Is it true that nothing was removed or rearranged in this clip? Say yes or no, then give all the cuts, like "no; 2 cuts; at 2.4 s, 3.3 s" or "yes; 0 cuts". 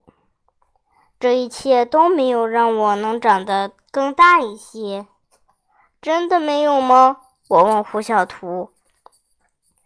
yes; 0 cuts